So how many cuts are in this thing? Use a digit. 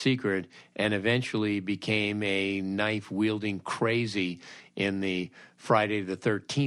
0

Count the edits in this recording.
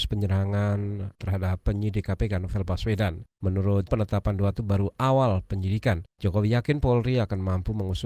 3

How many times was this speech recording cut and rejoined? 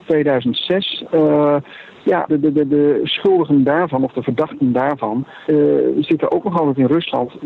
2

